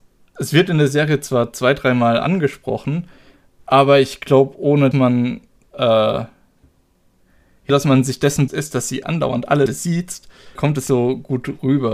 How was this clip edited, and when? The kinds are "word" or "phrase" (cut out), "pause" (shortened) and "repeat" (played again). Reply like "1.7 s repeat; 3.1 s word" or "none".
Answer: 4.9 s word; 5.6 s word; 7.7 s word; 8.5 s word; 9.0 s word; 9.7 s word; 10.6 s word; 10.9 s word